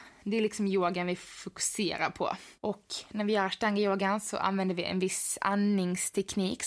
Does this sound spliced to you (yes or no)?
yes